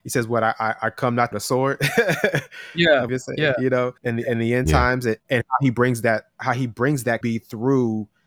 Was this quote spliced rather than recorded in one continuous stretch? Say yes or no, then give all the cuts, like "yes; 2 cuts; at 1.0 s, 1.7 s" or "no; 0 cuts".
yes; 6 cuts; at 1.3 s, 3.1 s, 4.0 s, 5.2 s, 6.3 s, 7.2 s